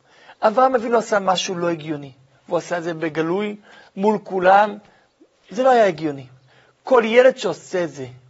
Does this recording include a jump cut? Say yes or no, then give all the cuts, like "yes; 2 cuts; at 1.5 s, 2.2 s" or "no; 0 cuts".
no; 0 cuts